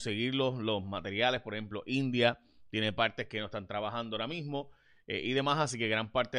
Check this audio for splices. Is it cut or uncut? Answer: uncut